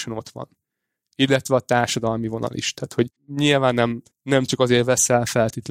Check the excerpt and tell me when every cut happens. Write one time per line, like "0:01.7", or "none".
0:03.2
0:04.1